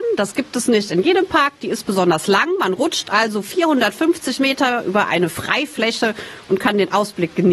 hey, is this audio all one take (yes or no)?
yes